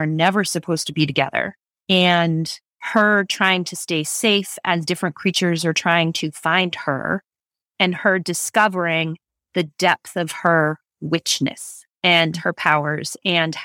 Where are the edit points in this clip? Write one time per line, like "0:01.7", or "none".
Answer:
none

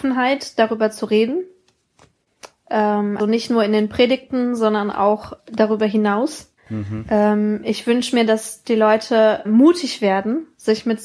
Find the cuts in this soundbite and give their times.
0:03.2
0:05.4
0:06.6
0:09.4

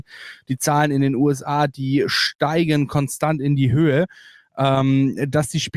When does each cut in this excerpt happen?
none

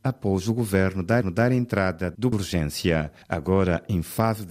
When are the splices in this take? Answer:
0:01.2
0:02.3
0:03.2

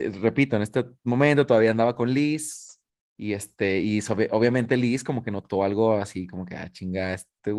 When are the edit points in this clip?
0:02.9

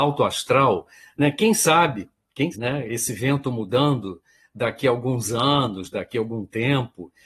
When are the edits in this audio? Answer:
0:02.5

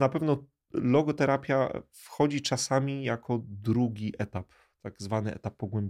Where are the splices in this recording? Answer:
none

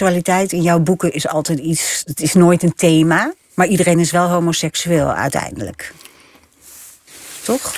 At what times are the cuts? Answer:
0:03.4

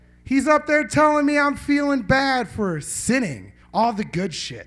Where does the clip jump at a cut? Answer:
0:03.6

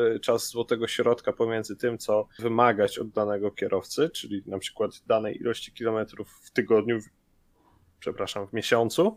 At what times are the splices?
0:02.4

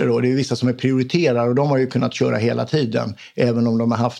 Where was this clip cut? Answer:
none

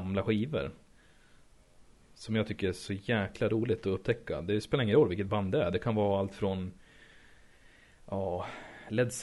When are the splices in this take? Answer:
none

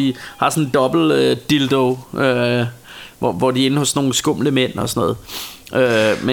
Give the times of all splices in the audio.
none

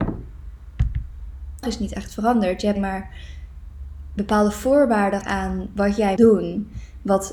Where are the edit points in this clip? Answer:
0:01.6
0:02.8
0:05.2
0:06.2

